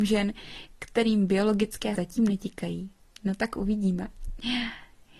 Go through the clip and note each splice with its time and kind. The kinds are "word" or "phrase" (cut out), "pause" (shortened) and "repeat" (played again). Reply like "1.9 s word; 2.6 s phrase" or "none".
1.9 s word